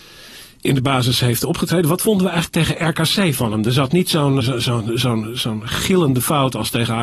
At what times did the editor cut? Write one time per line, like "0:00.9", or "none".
0:04.4